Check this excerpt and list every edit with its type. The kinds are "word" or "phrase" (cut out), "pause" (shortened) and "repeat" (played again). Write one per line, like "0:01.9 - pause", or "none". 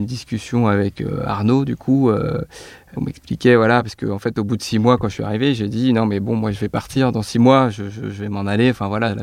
none